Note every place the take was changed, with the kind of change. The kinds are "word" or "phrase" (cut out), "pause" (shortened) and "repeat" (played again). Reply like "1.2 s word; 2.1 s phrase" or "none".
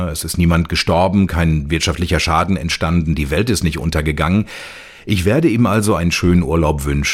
none

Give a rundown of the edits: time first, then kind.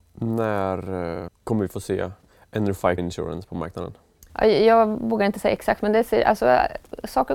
1.3 s word; 3.0 s word; 4.3 s pause

